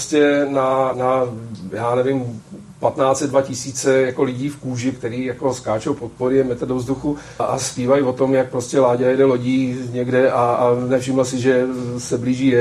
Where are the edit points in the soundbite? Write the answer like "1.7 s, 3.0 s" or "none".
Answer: 0.9 s, 4.9 s, 7.4 s